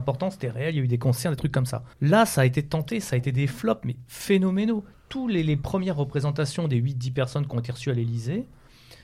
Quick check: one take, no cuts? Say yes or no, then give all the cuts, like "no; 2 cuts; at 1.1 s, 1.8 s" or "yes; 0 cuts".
no; 1 cut; at 1.9 s